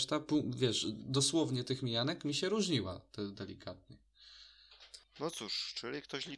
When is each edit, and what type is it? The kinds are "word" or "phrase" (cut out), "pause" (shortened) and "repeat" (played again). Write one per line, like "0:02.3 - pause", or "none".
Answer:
0:05.0 - pause